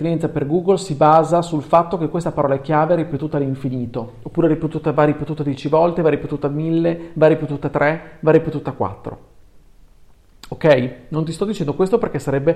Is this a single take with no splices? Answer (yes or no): yes